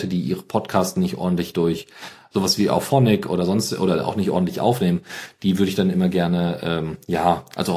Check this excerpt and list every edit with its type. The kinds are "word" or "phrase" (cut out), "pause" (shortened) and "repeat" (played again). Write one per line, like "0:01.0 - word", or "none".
none